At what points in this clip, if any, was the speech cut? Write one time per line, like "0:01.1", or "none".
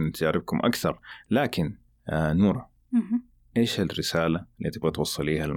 none